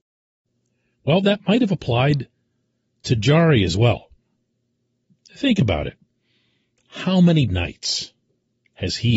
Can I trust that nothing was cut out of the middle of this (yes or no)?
no